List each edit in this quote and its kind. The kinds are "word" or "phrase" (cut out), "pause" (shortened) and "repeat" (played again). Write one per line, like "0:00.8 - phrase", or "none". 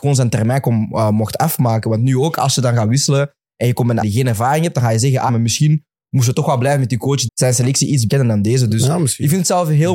0:04.0 - word
0:05.3 - word
0:07.3 - word
0:08.1 - word